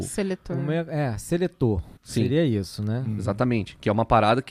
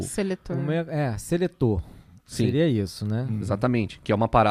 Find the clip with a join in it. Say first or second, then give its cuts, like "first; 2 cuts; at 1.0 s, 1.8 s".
first; 1 cut; at 2.0 s